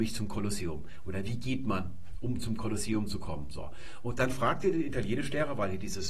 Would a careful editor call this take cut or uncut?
uncut